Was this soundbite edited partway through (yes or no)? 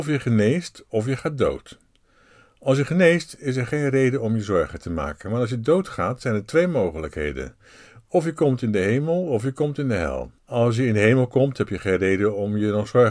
yes